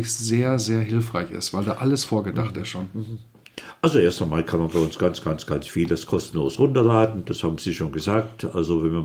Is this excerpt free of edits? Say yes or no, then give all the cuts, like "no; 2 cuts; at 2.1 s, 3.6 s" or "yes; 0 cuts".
yes; 0 cuts